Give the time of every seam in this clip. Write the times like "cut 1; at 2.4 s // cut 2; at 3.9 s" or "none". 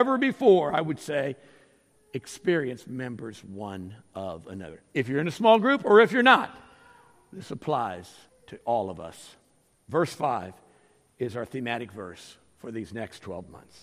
cut 1; at 8.3 s